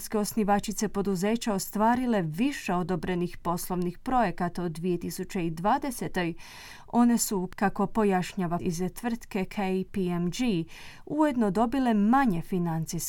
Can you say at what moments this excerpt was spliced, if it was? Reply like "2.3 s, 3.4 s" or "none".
8.6 s